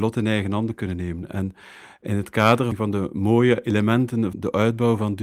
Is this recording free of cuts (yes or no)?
no